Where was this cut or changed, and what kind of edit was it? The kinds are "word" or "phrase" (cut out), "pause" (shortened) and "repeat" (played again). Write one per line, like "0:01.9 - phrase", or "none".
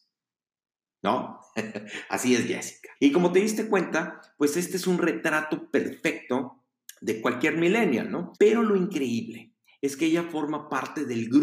0:03.0 - pause
0:06.9 - pause
0:08.3 - pause